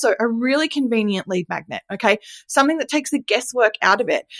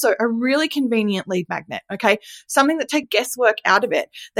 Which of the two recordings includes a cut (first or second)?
second